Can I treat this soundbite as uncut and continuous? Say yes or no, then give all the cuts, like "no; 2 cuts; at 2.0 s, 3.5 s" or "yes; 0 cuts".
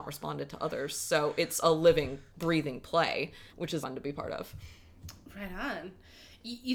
no; 4 cuts; at 1.6 s, 2.3 s, 3.5 s, 3.8 s